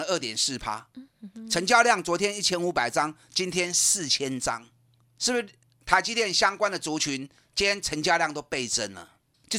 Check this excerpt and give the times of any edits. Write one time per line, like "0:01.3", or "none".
0:05.6

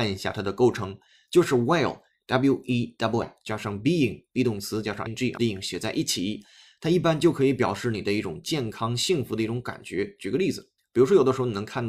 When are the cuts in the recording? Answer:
0:03.2
0:05.1
0:05.4

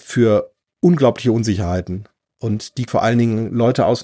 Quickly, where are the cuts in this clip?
0:02.9

